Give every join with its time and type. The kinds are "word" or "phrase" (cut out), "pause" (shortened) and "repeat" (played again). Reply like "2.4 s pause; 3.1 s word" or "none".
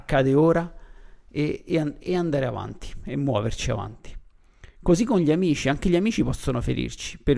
2.0 s word